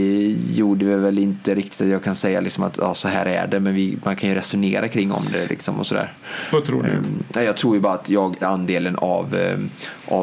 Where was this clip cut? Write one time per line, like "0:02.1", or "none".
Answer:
0:08.4